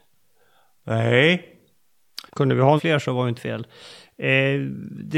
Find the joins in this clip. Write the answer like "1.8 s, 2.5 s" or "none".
2.3 s, 2.8 s, 3.4 s